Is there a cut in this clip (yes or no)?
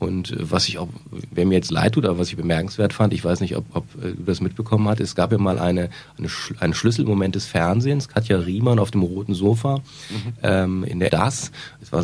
yes